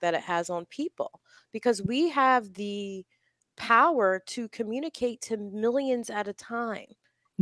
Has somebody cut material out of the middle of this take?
no; 0 cuts

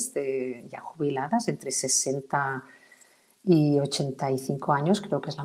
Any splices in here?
no; 0 cuts

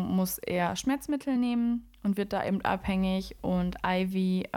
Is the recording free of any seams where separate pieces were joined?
yes; 0 cuts

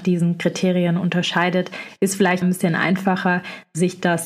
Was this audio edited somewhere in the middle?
yes; 1 cut; at 2.4 s

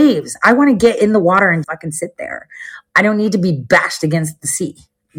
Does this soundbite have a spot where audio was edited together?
yes; 1 cut; at 1.6 s

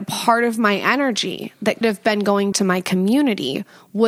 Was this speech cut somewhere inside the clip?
yes; 2 cuts; at 1.8 s, 2.5 s

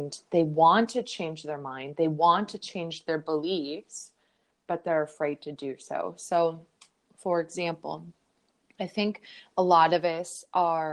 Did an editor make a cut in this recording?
no; 0 cuts

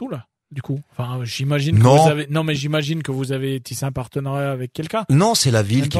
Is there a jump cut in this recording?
no; 0 cuts

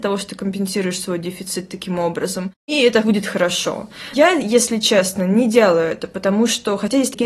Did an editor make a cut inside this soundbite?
no; 0 cuts

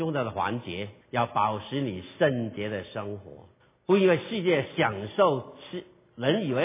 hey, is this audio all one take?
no; 2 cuts; at 1.0 s, 3.6 s

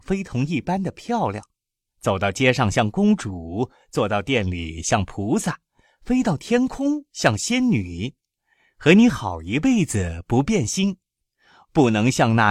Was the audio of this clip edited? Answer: no; 0 cuts

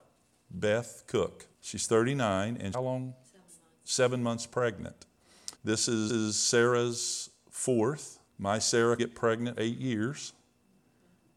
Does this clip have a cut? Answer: yes; 7 cuts; at 1.5 s, 2.7 s, 5.5 s, 6.1 s, 8.3 s, 9.0 s, 9.6 s

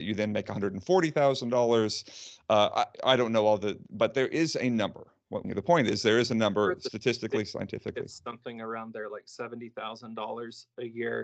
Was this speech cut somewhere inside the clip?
yes; 2 cuts; at 2.9 s, 5.4 s

